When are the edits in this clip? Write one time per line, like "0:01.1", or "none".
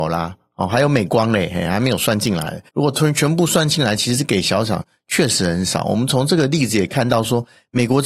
0:02.7